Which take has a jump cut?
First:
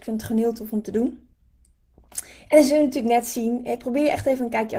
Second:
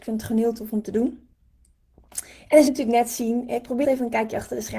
second; 2 cuts; at 2.7 s, 3.8 s

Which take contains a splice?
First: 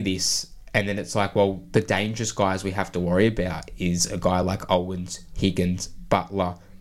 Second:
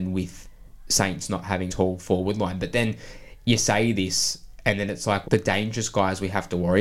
second; 2 cuts; at 1.7 s, 5.2 s

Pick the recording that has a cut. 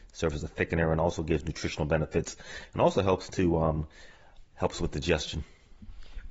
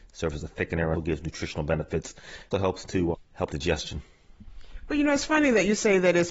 second; 4 cuts; at 0.9 s, 2.5 s, 3.1 s, 3.5 s

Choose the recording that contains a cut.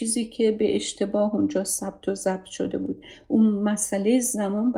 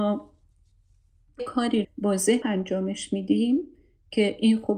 second; 3 cuts; at 1.4 s, 1.8 s, 2.4 s

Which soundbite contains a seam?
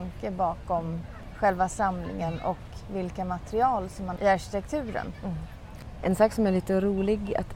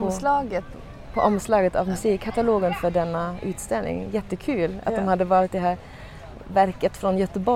first; 1 cut; at 4.2 s

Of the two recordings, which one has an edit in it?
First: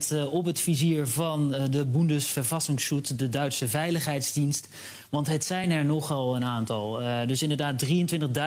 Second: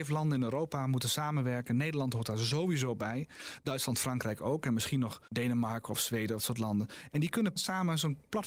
second; 3 cuts; at 5.3 s, 6.4 s, 7.6 s

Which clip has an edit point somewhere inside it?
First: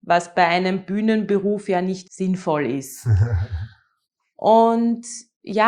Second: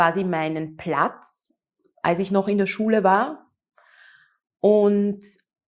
first; 1 cut; at 2.1 s

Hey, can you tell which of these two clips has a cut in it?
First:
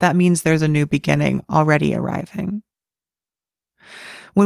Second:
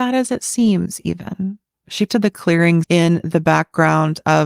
second; 2 cuts; at 2.1 s, 2.8 s

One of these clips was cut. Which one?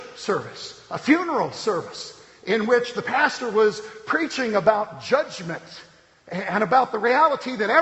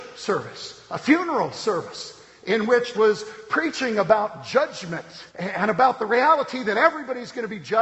second; 2 cuts; at 2.9 s, 5.3 s

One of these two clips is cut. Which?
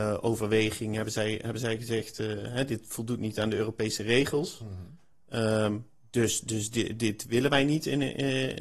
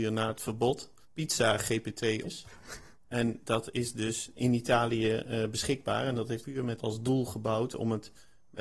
second; 6 cuts; at 1.0 s, 2.2 s, 3.5 s, 4.3 s, 6.4 s, 6.8 s

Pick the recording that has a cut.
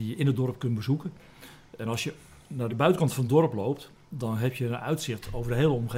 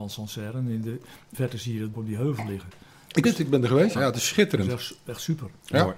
second; 4 cuts; at 1.3 s, 1.9 s, 3.2 s, 4.0 s

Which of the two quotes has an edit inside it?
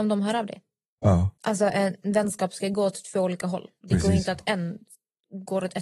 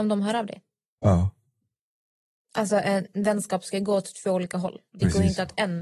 first; 1 cut; at 1.4 s

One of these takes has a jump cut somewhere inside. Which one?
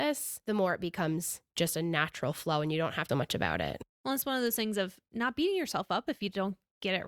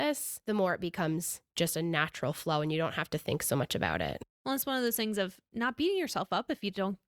first; 1 cut; at 3.1 s

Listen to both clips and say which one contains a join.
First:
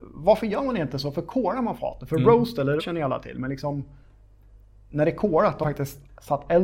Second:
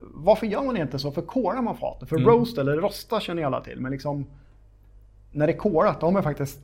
first; 2 cuts; at 2.8 s, 5.6 s

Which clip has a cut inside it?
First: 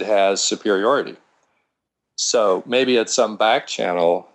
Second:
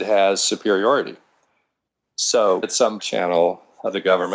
second; 2 cuts; at 2.6 s, 3.0 s

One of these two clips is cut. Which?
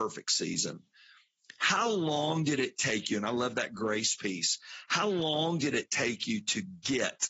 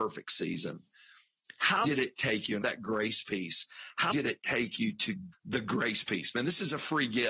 second; 4 cuts; at 1.8 s, 2.6 s, 4.1 s, 5.3 s

